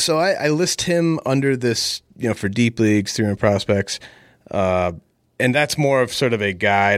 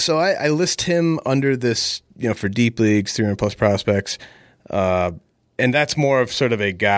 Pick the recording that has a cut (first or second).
first